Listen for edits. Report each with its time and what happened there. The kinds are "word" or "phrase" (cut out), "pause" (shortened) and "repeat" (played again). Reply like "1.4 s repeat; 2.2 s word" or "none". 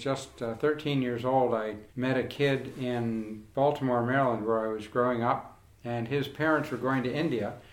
1.9 s pause